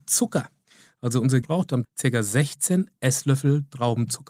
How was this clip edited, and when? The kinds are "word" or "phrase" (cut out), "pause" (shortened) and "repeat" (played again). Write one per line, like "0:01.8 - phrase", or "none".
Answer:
0:01.4 - word
0:01.8 - word